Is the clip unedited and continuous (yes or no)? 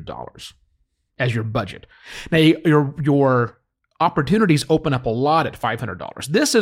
yes